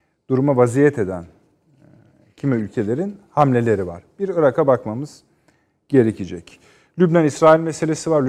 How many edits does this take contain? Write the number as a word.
zero